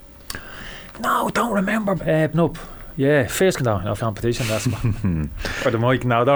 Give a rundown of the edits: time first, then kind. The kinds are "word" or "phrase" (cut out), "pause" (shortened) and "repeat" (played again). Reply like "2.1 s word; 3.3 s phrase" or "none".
2.0 s word; 2.3 s word; 3.6 s word; 4.0 s word